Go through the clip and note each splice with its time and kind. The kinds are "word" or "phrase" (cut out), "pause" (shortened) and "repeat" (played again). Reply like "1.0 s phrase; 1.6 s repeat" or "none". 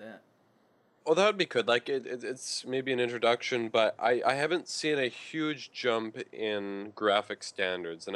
none